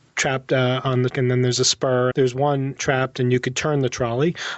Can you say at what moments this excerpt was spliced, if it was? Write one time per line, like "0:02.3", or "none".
0:01.1
0:02.1
0:02.8